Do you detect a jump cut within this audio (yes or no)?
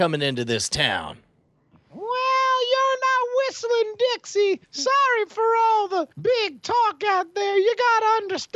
yes